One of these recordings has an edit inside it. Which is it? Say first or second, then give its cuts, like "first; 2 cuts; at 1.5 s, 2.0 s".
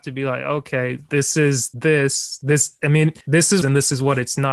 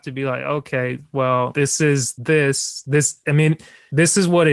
first; 3 cuts; at 1.1 s, 3.2 s, 3.6 s